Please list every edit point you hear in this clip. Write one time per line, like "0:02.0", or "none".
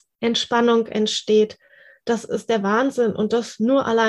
none